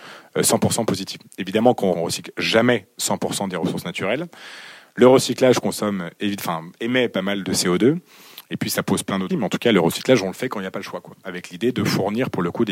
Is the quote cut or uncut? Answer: cut